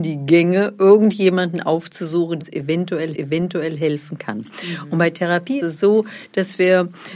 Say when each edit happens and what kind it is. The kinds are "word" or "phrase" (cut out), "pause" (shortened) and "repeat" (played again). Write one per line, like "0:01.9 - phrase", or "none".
0:02.4 - word
0:03.1 - repeat
0:05.6 - word